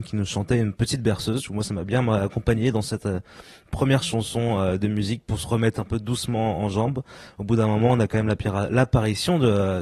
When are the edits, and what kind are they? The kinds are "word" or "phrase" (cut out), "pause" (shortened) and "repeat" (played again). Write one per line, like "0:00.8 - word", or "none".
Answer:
none